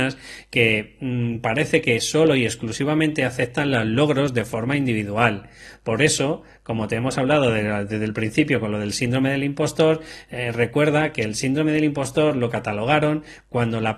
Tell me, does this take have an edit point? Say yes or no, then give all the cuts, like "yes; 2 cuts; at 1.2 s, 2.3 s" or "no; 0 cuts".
no; 0 cuts